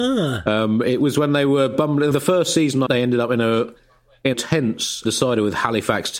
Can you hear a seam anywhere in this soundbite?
yes; 4 cuts; at 2.1 s, 2.9 s, 4.3 s, 5.0 s

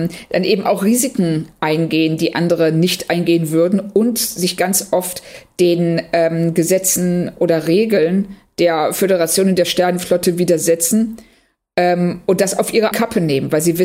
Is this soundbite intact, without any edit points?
no; 1 cut; at 12.9 s

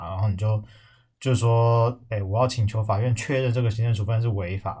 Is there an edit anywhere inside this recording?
no; 0 cuts

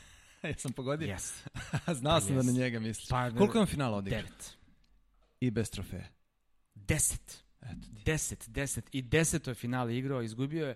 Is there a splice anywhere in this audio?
no; 0 cuts

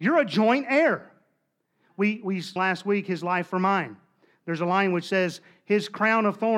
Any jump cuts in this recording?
yes; 1 cut; at 2.6 s

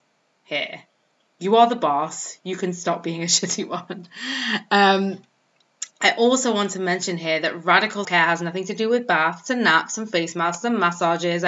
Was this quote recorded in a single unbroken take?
no; 1 cut; at 8.0 s

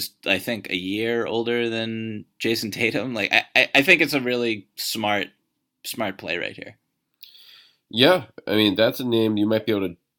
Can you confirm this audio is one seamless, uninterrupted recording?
yes; 0 cuts

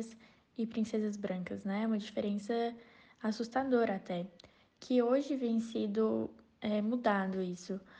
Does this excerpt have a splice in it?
no; 0 cuts

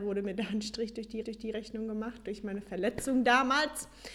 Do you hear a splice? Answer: yes; 1 cut; at 1.2 s

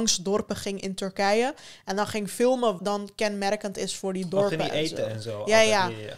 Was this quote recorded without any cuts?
no; 1 cut; at 2.8 s

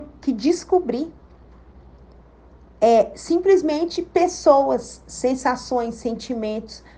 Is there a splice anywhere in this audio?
no; 0 cuts

